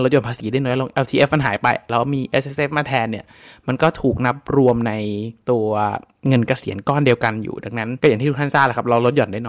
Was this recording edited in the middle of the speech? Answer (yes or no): no